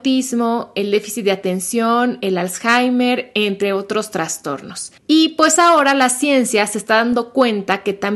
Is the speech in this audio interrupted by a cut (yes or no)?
yes